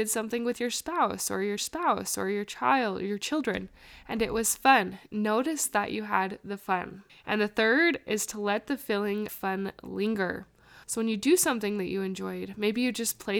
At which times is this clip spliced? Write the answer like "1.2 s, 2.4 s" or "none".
1.6 s, 7.1 s, 9.3 s, 10.8 s